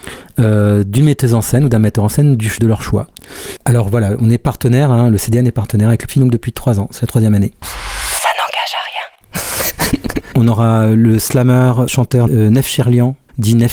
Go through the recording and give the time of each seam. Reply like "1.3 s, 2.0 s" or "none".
2.6 s, 6.1 s